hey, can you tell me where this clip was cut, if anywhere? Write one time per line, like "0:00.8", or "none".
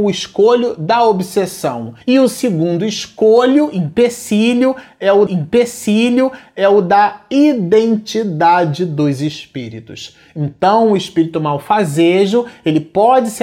0:02.0
0:05.3